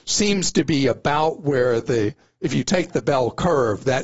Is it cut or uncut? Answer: uncut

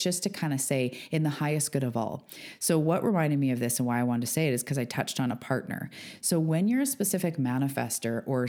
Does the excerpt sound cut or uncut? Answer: uncut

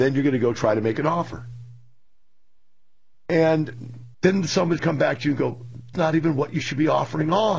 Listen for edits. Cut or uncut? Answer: cut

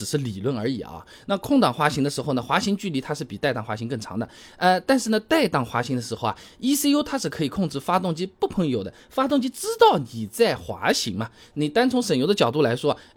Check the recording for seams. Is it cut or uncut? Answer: uncut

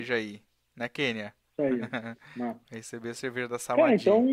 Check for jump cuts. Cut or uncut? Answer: uncut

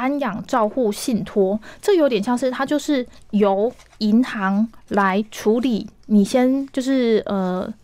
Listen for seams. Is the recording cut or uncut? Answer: uncut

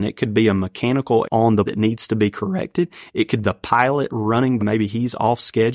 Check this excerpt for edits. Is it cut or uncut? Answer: cut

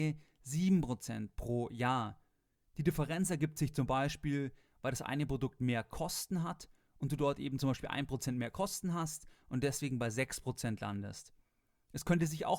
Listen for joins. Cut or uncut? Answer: uncut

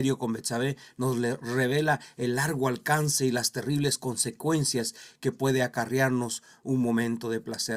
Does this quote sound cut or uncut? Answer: uncut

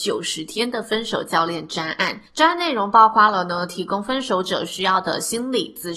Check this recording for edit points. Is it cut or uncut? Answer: cut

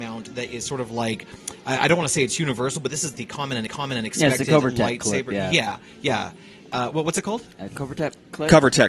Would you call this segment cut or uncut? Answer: cut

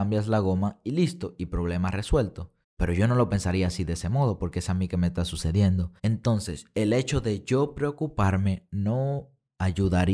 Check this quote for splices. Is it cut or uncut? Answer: cut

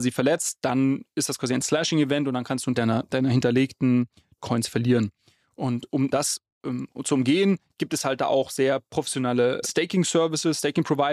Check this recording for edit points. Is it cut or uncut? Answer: cut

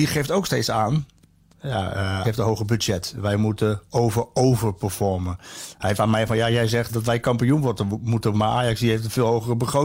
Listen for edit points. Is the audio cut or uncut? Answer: cut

